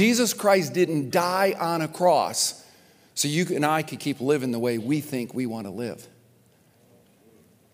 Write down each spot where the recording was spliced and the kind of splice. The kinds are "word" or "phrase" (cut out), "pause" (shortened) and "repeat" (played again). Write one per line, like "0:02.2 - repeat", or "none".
none